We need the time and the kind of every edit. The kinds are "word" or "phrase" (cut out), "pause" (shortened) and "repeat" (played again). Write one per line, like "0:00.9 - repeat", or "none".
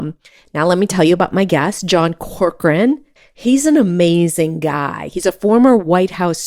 0:03.2 - pause